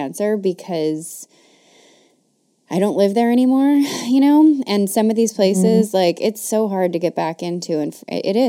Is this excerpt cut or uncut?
uncut